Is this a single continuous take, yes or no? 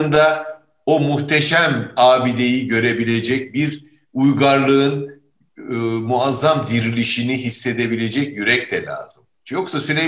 yes